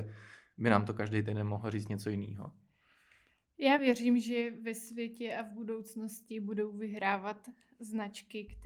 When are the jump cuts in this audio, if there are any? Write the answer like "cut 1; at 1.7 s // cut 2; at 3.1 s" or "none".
none